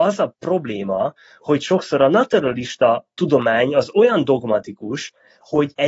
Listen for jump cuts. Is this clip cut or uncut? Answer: uncut